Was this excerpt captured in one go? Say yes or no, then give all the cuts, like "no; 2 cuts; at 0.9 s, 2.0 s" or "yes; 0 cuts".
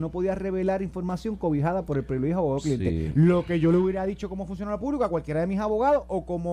yes; 0 cuts